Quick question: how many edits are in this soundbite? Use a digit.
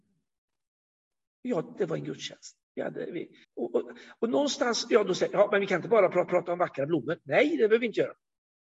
4